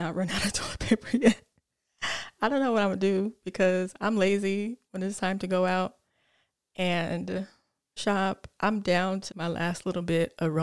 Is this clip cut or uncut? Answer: cut